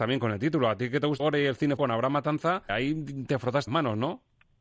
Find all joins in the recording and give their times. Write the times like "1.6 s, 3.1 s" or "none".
1.2 s, 1.8 s, 2.7 s, 3.7 s